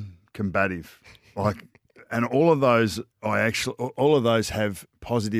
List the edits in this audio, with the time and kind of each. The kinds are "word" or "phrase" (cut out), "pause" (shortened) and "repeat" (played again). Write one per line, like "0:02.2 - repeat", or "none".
0:03.1 - pause